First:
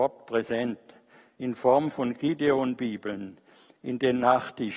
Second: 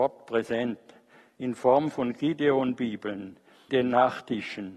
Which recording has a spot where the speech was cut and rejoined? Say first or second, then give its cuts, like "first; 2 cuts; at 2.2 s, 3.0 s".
second; 1 cut; at 3.7 s